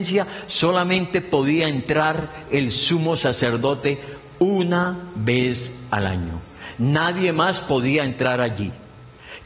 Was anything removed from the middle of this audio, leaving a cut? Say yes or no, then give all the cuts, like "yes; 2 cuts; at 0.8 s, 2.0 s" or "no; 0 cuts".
no; 0 cuts